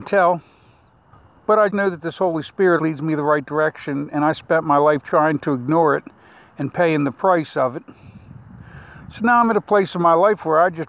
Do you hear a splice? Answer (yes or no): yes